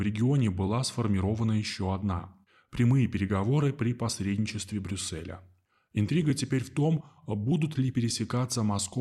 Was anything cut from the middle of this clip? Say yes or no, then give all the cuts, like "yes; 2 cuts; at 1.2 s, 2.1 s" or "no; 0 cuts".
no; 0 cuts